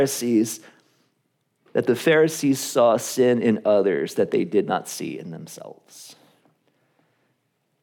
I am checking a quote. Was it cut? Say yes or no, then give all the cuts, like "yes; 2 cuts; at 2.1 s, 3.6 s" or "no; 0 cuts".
no; 0 cuts